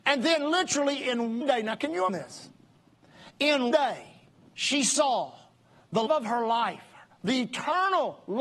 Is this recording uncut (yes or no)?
no